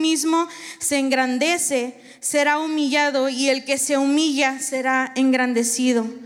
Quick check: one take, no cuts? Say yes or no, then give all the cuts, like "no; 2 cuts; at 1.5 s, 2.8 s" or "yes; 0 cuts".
yes; 0 cuts